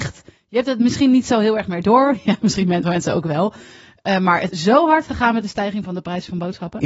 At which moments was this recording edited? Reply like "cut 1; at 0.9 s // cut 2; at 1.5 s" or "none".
cut 1; at 2.8 s // cut 2; at 4.5 s